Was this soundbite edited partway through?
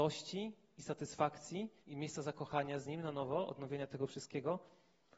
yes; 1 cut; at 1.8 s

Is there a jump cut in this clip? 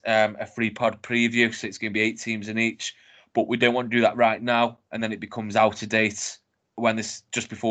no; 0 cuts

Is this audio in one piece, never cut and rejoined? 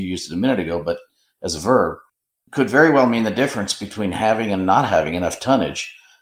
yes; 0 cuts

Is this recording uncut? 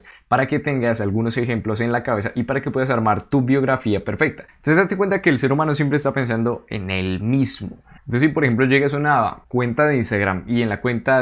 yes; 0 cuts

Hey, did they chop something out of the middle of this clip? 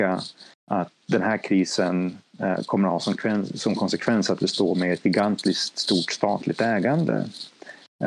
no; 0 cuts

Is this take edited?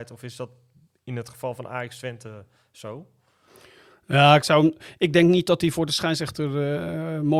no; 0 cuts

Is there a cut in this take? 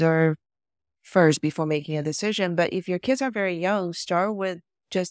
no; 0 cuts

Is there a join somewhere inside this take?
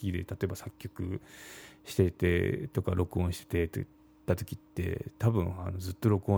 no; 0 cuts

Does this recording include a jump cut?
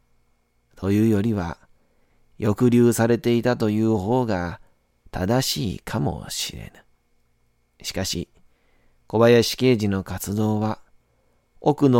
no; 0 cuts

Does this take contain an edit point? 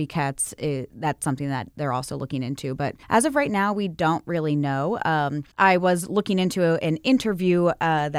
yes; 2 cuts; at 3.0 s, 5.5 s

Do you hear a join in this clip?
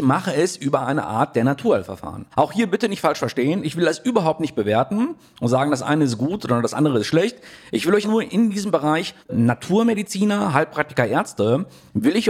yes; 3 cuts; at 2.3 s, 8.0 s, 9.2 s

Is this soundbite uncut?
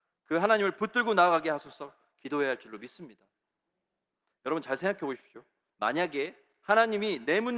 yes; 0 cuts

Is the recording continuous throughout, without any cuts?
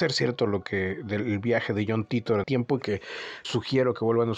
no; 2 cuts; at 2.4 s, 3.4 s

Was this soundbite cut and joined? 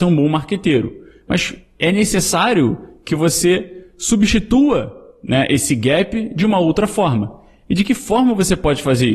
no; 0 cuts

